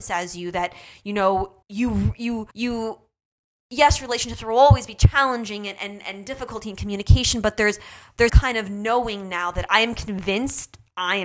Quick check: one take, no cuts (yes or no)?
no